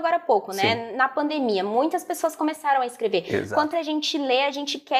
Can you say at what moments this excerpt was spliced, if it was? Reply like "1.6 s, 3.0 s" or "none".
3.7 s